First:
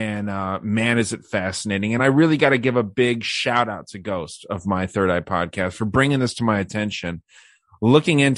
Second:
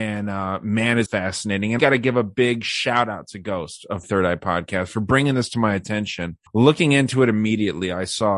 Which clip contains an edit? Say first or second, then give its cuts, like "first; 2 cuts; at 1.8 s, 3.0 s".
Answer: second; 4 cuts; at 1.1 s, 1.8 s, 4.0 s, 6.5 s